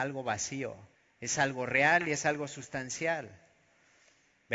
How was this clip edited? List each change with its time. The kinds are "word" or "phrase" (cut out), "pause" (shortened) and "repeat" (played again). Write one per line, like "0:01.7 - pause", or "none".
0:00.9 - pause